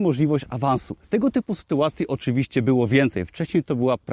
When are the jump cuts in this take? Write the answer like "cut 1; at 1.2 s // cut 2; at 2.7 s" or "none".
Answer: cut 1; at 1.0 s